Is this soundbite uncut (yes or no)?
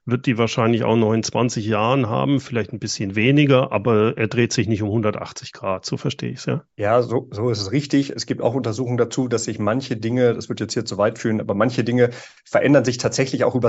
no